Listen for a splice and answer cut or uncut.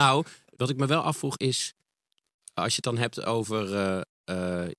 uncut